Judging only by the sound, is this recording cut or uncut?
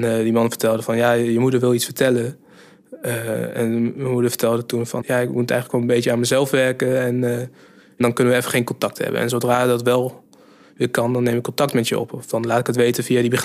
uncut